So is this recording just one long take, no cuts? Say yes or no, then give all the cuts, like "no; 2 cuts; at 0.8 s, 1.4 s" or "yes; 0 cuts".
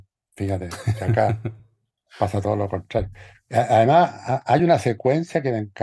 yes; 0 cuts